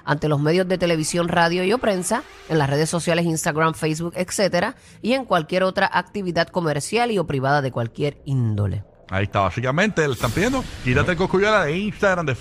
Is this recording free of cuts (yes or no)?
yes